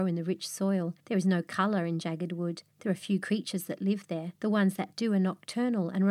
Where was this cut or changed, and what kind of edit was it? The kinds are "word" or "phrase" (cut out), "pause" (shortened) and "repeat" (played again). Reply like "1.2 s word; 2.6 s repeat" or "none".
1.0 s pause; 2.7 s pause; 4.4 s pause